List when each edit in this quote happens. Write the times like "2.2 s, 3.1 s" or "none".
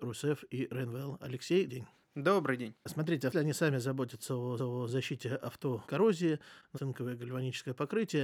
1.7 s, 3.3 s, 4.6 s, 5.8 s, 6.7 s